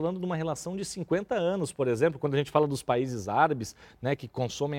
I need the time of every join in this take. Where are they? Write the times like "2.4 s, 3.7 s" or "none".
none